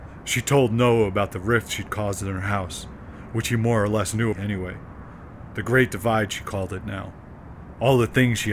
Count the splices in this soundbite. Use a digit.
1